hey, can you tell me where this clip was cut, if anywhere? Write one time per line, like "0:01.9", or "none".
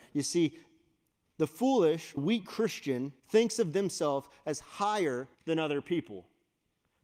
0:02.2
0:03.2
0:05.3

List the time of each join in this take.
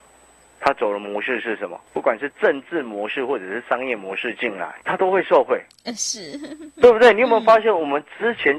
0:01.9
0:04.8

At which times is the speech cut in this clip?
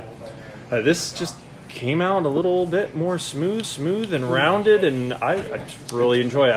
0:03.6

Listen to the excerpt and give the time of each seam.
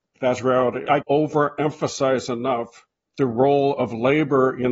0:01.0
0:02.9

